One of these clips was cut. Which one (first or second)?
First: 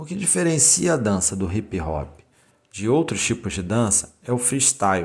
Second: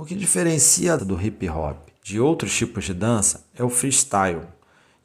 second